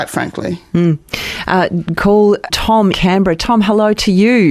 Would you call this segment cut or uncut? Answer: cut